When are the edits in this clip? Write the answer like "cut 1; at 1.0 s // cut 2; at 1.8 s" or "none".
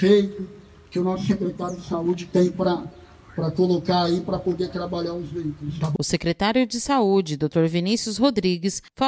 none